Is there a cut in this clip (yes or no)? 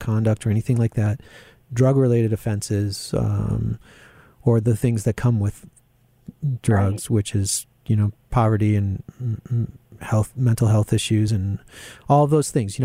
no